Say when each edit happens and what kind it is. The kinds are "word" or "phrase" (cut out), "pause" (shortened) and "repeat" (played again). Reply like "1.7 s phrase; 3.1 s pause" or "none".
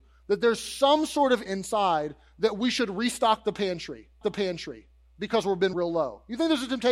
1.5 s word; 4.2 s repeat; 5.7 s word